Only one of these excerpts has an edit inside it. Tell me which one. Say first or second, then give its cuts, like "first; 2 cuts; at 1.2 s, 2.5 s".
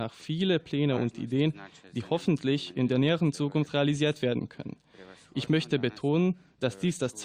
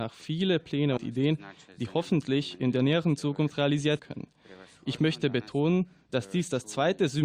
second; 2 cuts; at 1.0 s, 4.0 s